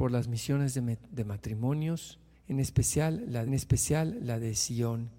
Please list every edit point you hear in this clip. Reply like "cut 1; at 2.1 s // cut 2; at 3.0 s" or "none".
cut 1; at 2.3 s // cut 2; at 3.5 s